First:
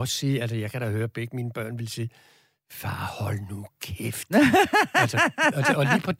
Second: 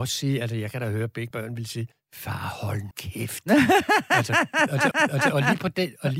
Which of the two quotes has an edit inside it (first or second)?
second